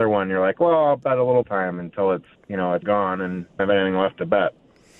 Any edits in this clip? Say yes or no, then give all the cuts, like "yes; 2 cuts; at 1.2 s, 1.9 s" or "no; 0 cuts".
yes; 4 cuts; at 1.4 s, 2.3 s, 2.8 s, 3.6 s